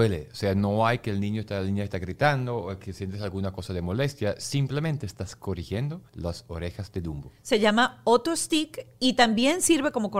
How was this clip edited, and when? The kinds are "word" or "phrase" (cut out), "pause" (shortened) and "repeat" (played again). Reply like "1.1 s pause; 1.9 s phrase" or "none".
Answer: 6.1 s pause